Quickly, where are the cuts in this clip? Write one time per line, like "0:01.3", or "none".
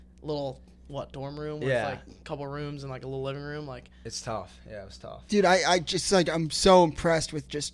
none